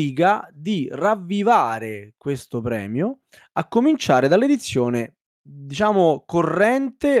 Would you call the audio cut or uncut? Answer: uncut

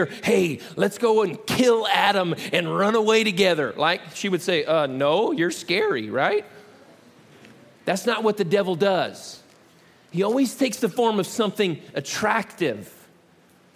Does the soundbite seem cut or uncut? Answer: uncut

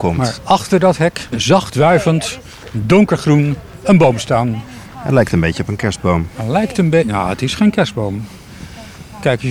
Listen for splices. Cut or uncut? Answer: cut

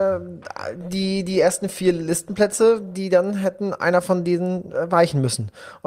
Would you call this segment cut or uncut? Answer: uncut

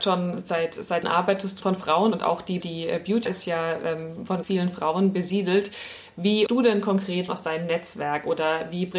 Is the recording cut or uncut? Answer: cut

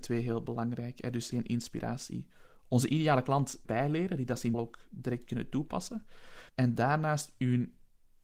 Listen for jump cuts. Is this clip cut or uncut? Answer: cut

